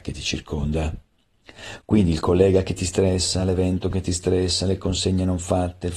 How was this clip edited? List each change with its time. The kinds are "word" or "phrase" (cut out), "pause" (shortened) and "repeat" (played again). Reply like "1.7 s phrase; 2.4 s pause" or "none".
none

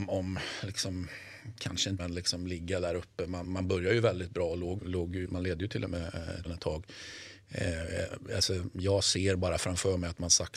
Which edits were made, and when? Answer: 2.0 s word; 3.4 s word; 4.8 s word; 5.3 s word; 6.4 s word

